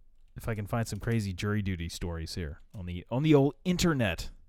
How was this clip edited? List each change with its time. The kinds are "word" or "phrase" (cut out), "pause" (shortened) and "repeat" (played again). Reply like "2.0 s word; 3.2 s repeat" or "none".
2.7 s pause